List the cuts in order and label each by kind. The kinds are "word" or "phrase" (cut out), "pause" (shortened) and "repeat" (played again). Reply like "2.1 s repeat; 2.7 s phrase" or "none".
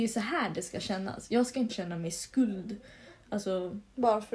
1.7 s word